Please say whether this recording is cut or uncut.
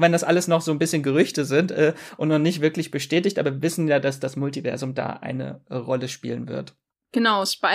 uncut